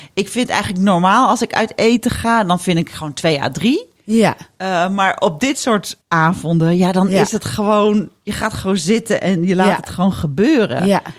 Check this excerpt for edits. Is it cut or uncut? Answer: cut